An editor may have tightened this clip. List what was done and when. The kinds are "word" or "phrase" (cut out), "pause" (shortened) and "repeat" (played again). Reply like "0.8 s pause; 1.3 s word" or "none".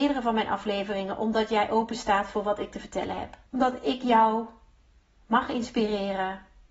3.5 s pause